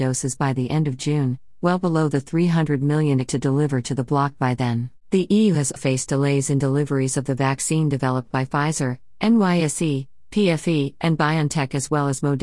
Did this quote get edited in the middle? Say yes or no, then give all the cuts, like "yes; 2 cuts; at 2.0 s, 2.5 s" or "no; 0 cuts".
yes; 3 cuts; at 3.3 s, 5.0 s, 5.8 s